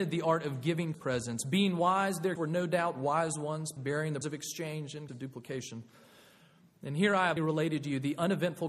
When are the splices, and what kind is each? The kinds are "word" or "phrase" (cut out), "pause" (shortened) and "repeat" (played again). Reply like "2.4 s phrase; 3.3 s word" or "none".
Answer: 0.9 s word; 2.3 s word; 3.8 s word; 4.2 s word; 5.1 s word; 7.4 s word

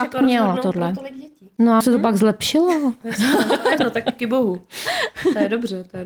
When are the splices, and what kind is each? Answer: 1.8 s word; 3.8 s word; 4.2 s word

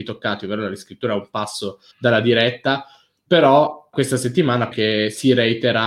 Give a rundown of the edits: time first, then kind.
1.9 s pause; 3.9 s word; 4.7 s phrase

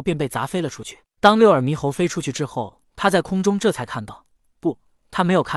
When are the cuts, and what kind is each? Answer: 2.9 s pause

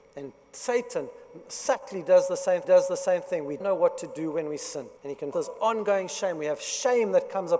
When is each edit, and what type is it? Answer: 2.6 s repeat; 3.6 s word; 5.0 s pause; 5.3 s phrase

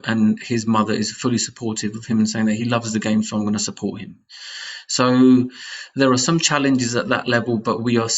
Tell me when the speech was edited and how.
none

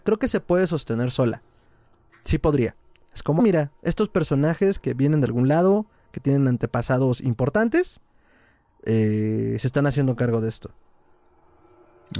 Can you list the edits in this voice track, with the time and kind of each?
3.4 s word

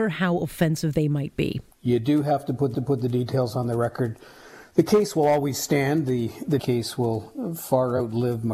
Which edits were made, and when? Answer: 1.7 s pause; 2.7 s repeat; 6.6 s phrase

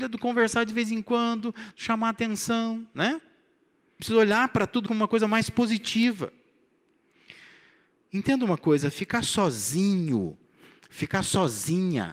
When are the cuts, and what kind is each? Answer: 4.0 s word; 4.9 s word

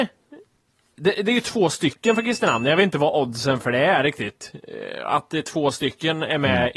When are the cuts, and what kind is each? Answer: none

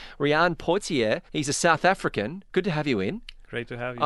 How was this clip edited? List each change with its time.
1.3 s pause

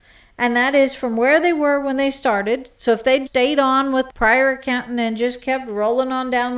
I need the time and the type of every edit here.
3.3 s word; 4.1 s word

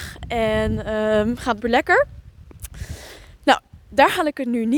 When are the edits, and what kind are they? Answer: 1.6 s word; 3.8 s pause

